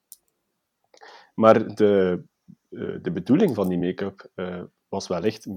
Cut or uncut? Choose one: uncut